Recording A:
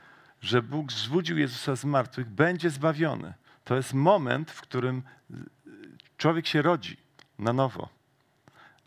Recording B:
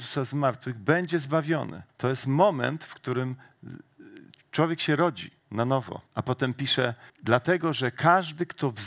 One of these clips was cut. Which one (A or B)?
B